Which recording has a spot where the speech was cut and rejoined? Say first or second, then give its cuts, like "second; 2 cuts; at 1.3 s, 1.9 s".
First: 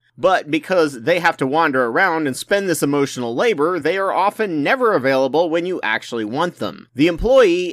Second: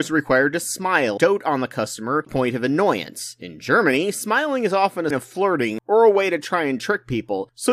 second; 3 cuts; at 1.2 s, 2.3 s, 5.1 s